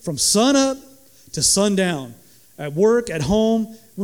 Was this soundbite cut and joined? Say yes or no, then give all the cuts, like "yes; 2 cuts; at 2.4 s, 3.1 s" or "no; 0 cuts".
no; 0 cuts